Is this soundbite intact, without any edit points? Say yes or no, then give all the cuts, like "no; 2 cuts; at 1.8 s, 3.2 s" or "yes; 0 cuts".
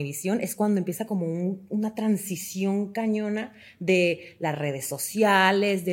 yes; 0 cuts